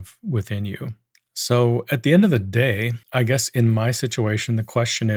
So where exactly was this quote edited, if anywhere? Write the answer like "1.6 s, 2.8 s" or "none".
1.1 s, 3.0 s

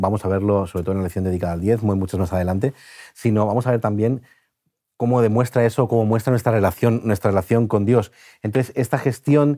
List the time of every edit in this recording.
none

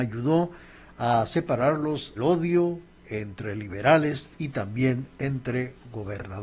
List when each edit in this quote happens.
2.2 s, 4.3 s

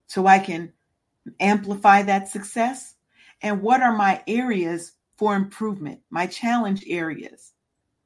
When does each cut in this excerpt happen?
6.0 s

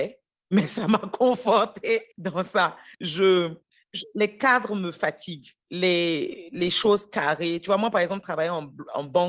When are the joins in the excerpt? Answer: 2.1 s, 2.9 s, 5.6 s

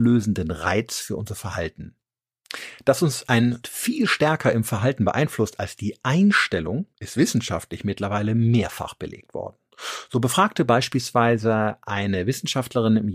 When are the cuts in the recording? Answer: 3.6 s, 6.9 s

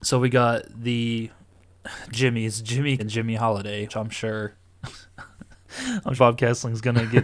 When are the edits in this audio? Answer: 2.1 s, 3.0 s, 3.9 s, 6.2 s

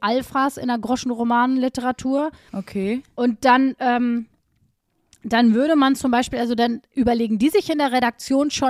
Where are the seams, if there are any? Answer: none

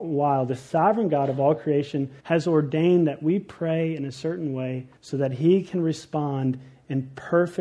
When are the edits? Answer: 2.2 s, 5.0 s

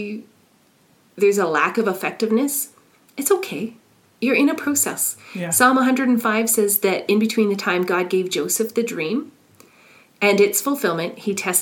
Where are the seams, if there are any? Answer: none

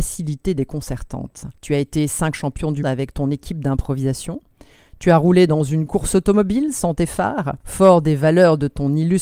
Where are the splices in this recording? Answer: 1.6 s, 2.3 s, 2.8 s, 7.6 s

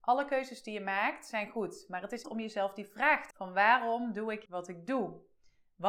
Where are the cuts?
2.2 s, 3.3 s, 4.5 s

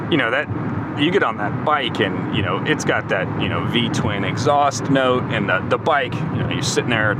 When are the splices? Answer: 6.1 s

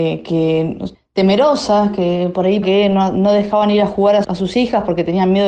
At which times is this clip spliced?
0.9 s, 2.6 s, 4.2 s

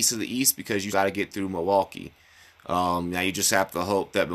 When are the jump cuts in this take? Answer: 0.9 s

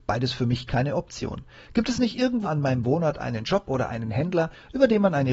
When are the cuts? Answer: 2.5 s

